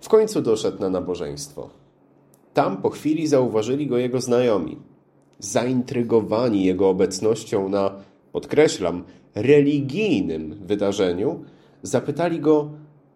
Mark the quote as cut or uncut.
uncut